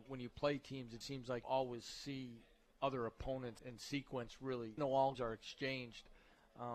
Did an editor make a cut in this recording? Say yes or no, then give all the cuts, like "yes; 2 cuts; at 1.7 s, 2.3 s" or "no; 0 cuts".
yes; 5 cuts; at 1.0 s, 1.4 s, 3.6 s, 4.8 s, 5.1 s